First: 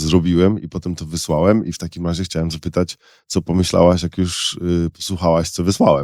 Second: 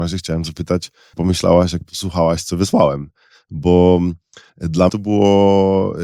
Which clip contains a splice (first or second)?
second